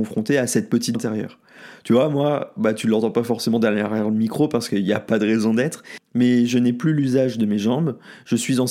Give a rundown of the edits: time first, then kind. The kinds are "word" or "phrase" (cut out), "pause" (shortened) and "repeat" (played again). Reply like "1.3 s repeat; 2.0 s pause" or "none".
0.9 s word